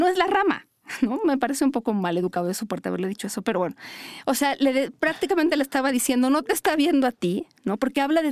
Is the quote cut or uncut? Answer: uncut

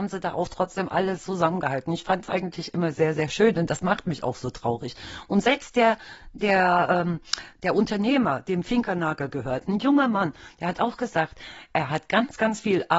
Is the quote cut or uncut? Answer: uncut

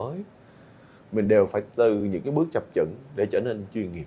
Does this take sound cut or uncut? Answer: uncut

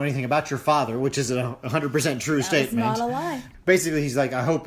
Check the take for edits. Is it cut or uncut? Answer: uncut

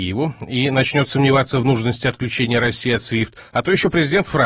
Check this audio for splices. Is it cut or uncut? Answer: uncut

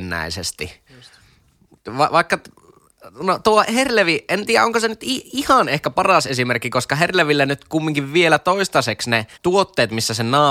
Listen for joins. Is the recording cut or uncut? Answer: cut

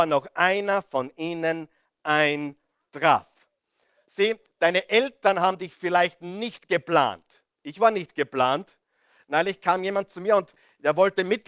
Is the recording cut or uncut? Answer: uncut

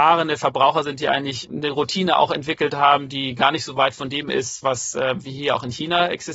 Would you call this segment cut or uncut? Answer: uncut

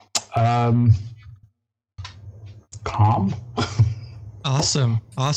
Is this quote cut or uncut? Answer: uncut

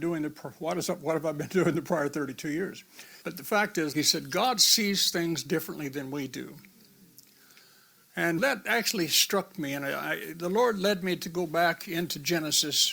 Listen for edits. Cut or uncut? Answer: cut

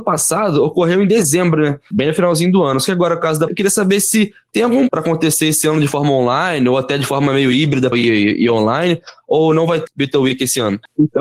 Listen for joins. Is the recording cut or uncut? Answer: cut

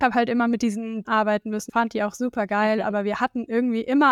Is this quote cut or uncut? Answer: cut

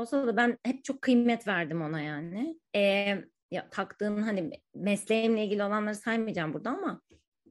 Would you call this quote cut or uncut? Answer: cut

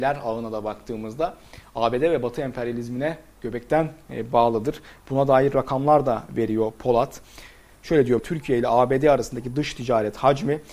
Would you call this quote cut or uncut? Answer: cut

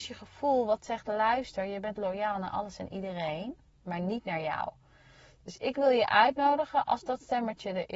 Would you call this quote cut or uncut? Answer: uncut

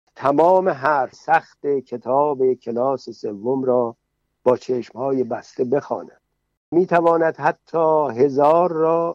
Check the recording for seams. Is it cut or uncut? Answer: cut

